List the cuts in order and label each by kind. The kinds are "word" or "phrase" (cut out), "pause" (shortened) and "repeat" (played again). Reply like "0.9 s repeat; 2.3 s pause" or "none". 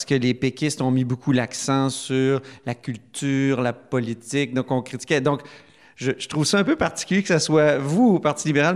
none